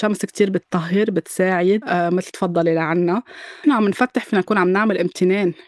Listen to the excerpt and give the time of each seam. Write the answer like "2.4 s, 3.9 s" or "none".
1.8 s, 2.3 s, 3.6 s